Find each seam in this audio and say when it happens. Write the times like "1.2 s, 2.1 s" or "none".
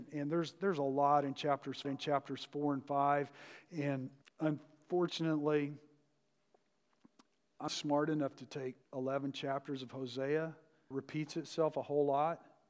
1.8 s, 4.2 s, 7.7 s, 8.8 s, 10.9 s

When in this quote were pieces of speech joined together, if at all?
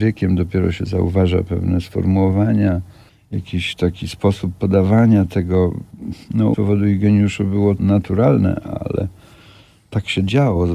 3.1 s, 6.2 s, 6.5 s, 7.8 s

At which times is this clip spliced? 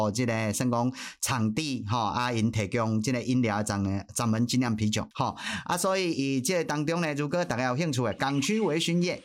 5.1 s

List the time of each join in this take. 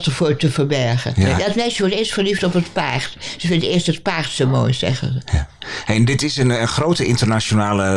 none

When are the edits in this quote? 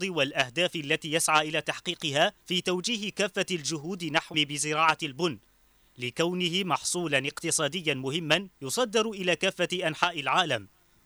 2.4 s, 4.3 s, 8.6 s

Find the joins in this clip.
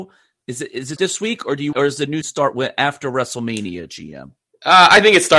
1.0 s, 1.7 s, 2.2 s

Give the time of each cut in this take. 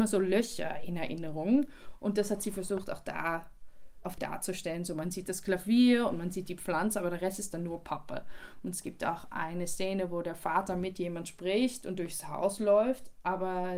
4.2 s

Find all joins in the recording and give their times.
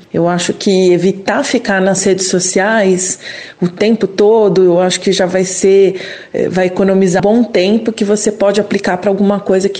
7.2 s

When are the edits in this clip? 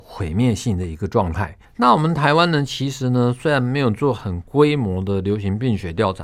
1.6 s

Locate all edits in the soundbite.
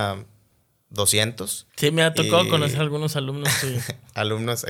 1.7 s

